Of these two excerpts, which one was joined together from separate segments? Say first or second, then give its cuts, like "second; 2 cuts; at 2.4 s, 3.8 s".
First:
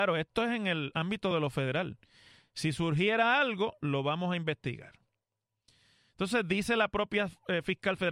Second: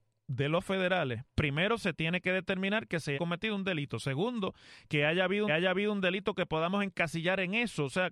second; 2 cuts; at 3.1 s, 5.5 s